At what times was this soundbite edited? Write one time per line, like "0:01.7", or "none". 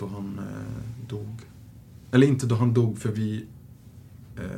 none